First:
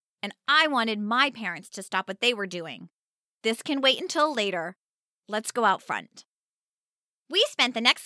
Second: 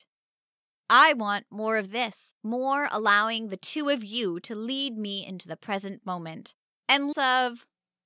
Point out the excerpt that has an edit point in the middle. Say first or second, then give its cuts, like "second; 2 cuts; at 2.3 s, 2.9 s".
second; 2 cuts; at 2.4 s, 7.1 s